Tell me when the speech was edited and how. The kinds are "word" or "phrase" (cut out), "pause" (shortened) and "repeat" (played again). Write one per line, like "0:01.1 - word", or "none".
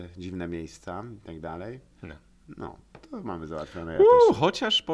none